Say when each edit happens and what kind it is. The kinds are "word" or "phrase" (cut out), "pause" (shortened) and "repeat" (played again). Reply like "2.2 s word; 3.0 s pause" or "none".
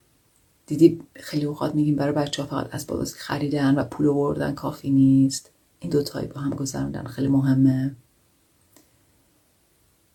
5.9 s word